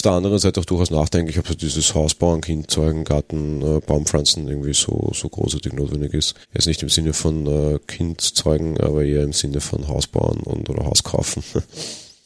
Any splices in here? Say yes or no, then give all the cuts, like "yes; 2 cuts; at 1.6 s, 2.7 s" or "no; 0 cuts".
yes; 1 cut; at 6.4 s